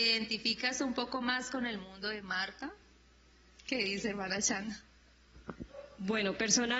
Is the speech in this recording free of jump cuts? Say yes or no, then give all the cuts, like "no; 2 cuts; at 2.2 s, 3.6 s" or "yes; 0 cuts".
yes; 0 cuts